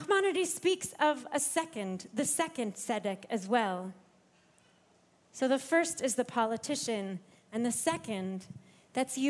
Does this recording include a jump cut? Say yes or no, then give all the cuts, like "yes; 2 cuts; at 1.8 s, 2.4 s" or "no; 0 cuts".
no; 0 cuts